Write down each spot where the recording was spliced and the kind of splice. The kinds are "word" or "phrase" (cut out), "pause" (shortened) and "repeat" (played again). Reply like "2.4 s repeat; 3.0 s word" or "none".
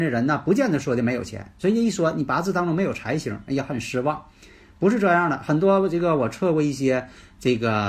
none